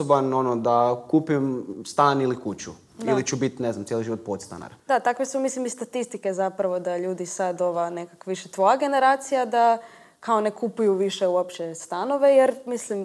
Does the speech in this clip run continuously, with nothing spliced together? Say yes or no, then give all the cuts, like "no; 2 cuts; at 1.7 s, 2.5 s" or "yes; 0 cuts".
no; 1 cut; at 4.8 s